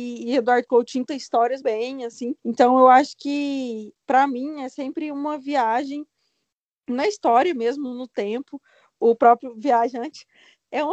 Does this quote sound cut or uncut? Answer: cut